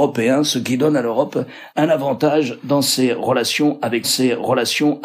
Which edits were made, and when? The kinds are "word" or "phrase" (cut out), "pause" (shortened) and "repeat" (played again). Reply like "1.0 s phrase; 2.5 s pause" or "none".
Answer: 1.7 s word; 4.0 s repeat